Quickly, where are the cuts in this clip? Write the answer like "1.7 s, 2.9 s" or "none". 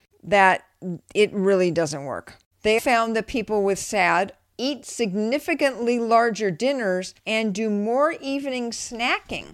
2.8 s, 7.2 s

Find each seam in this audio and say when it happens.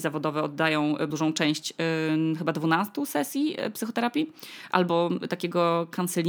1.1 s

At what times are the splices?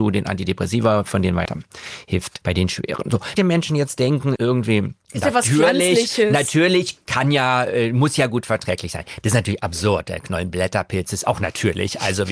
1.5 s, 2.4 s, 3.4 s, 4.4 s, 5.0 s

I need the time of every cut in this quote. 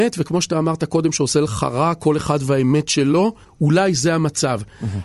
none

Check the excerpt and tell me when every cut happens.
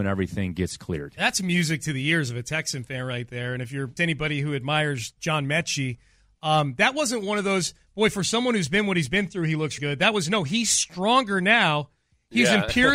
4.0 s, 5.2 s, 9.8 s

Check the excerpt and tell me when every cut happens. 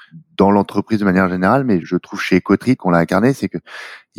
1.8 s, 2.8 s

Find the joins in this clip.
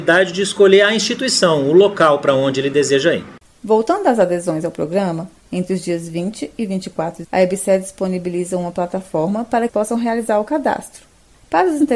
3.4 s, 7.2 s, 9.7 s

